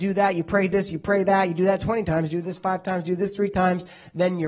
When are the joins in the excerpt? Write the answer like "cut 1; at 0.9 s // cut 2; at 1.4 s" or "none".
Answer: none